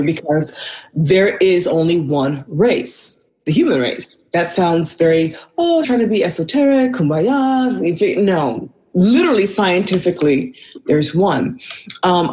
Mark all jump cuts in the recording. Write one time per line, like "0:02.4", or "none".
0:03.3
0:04.3
0:05.8